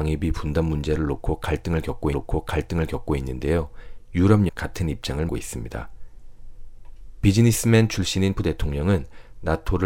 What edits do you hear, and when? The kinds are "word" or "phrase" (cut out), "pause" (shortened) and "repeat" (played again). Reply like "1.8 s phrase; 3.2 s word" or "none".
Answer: 2.1 s repeat; 4.5 s word; 5.3 s word; 8.4 s word